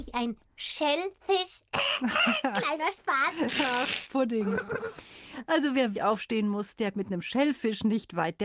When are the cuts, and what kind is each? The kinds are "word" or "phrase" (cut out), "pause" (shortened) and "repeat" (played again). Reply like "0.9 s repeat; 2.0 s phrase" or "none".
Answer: 5.9 s word; 6.9 s word